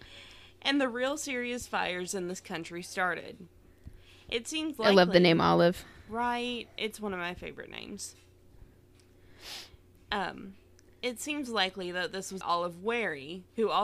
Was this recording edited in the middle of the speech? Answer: yes; 1 cut; at 12.4 s

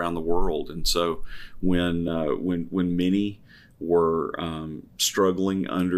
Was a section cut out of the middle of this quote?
no; 0 cuts

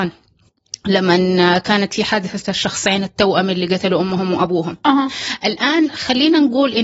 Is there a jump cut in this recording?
no; 0 cuts

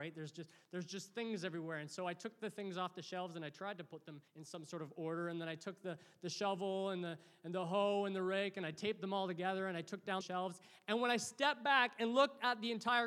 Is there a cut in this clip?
yes; 2 cuts; at 4.3 s, 10.2 s

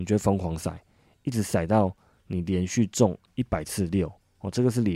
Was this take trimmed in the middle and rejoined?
no; 0 cuts

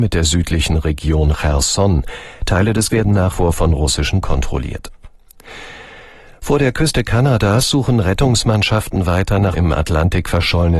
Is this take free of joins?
no; 4 cuts; at 2.9 s, 3.3 s, 4.2 s, 9.5 s

